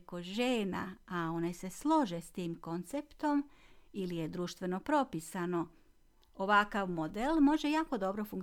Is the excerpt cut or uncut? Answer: uncut